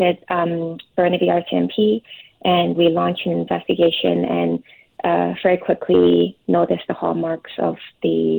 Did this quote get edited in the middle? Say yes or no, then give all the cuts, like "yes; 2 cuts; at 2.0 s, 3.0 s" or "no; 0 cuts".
yes; 1 cut; at 2.7 s